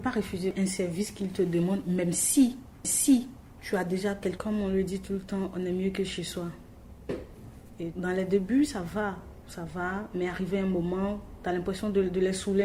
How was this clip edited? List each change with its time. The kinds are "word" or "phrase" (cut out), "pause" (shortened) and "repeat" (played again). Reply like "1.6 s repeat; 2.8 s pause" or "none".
2.8 s repeat; 4.4 s phrase; 7.9 s word